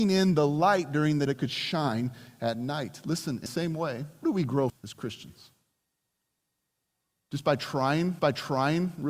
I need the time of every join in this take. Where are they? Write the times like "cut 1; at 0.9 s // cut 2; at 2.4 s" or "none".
cut 1; at 1.3 s // cut 2; at 3.5 s // cut 3; at 4.2 s // cut 4; at 4.7 s // cut 5; at 8.2 s